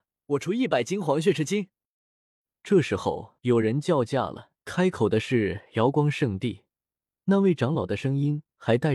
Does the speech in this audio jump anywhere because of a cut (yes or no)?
yes